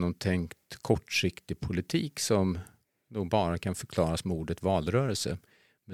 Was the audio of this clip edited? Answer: no; 0 cuts

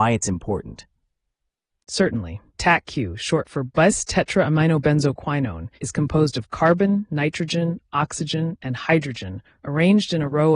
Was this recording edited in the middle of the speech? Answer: yes; 2 cuts; at 2.5 s, 5.8 s

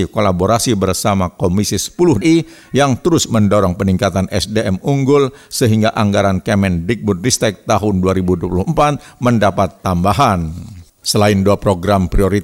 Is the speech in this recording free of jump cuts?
no; 2 cuts; at 2.2 s, 10.9 s

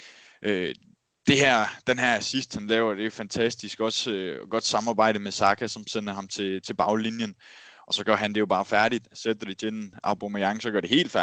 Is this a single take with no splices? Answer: yes; 0 cuts

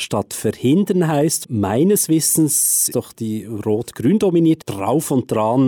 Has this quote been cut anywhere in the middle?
yes; 3 cuts; at 1.4 s, 2.9 s, 4.6 s

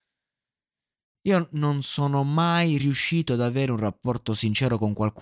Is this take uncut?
yes; 0 cuts

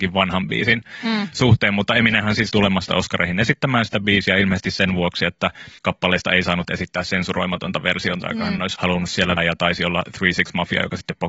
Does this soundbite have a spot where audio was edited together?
yes; 4 cuts; at 2.5 s, 5.8 s, 8.8 s, 9.4 s

